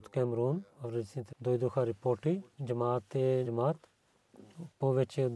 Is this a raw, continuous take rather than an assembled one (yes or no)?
no